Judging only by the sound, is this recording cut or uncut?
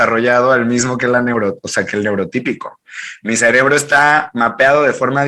uncut